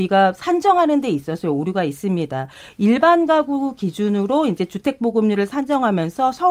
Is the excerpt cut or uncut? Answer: uncut